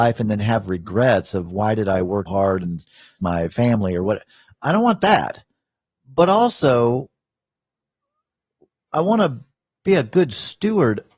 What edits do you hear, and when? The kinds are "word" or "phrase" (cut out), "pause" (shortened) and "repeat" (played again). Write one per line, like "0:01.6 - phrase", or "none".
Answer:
0:02.3 - word
0:03.2 - word